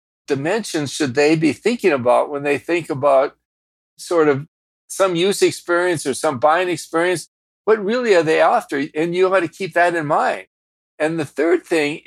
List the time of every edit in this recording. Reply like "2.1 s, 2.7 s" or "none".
none